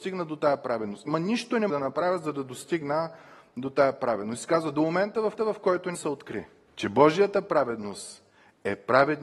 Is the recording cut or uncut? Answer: cut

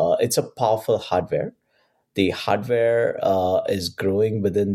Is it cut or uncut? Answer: uncut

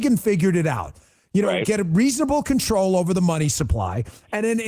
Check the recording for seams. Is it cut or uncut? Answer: uncut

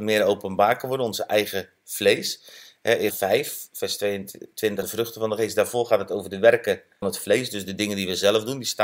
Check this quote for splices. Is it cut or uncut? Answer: cut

